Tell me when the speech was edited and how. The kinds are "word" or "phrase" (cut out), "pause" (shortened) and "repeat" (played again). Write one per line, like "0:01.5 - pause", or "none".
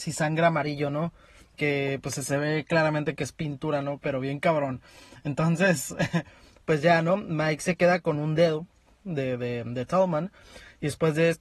none